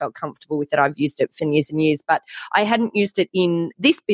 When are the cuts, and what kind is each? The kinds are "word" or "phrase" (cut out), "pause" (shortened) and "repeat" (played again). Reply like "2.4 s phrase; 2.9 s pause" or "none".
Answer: 1.4 s word

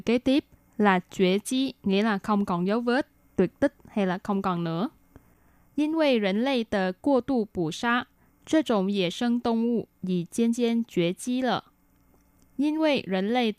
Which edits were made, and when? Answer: none

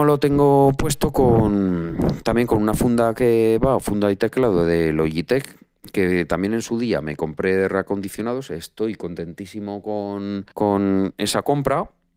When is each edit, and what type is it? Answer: 10.5 s pause

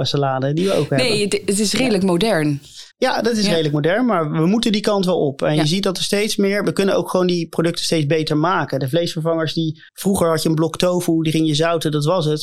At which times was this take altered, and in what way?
2.9 s pause; 9.9 s pause

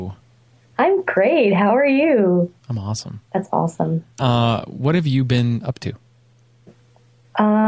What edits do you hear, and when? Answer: 2.6 s pause; 3.2 s pause; 4.1 s pause

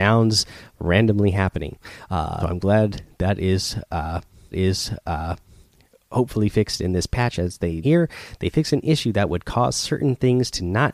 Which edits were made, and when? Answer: 2.4 s word; 4.5 s repeat; 7.8 s word

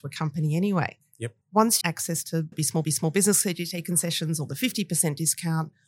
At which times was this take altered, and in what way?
1.4 s pause; 1.8 s phrase; 2.5 s word; 2.8 s repeat

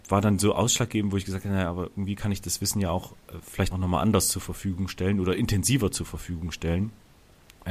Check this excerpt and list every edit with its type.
3.7 s word

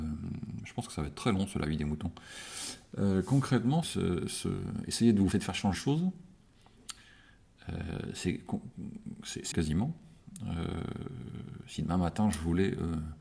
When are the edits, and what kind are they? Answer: 3.8 s word; 5.3 s phrase; 5.7 s word; 9.5 s word

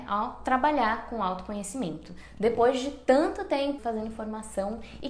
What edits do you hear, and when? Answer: 3.8 s word

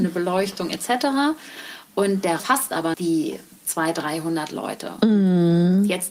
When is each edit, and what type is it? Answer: 2.4 s phrase; 2.9 s word

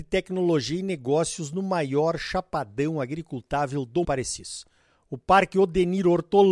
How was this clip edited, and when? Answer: 4.0 s phrase

